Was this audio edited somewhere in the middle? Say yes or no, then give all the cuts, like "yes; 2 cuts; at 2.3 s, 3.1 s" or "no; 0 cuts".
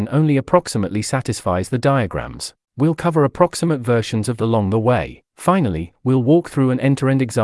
yes; 3 cuts; at 2.6 s, 4.4 s, 5.3 s